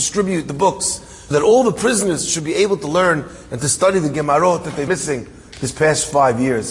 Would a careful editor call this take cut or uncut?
cut